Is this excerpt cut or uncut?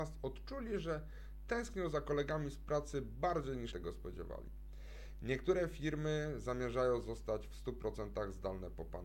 cut